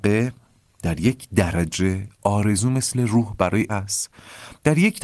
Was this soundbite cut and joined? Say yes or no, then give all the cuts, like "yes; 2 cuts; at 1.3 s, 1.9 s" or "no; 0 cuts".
yes; 1 cut; at 3.7 s